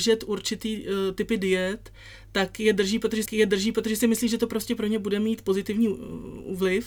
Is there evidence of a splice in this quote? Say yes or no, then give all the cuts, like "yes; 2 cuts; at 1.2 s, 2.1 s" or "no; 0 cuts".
yes; 1 cut; at 3.3 s